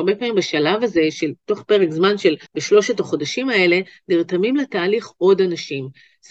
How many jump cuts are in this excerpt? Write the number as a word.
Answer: one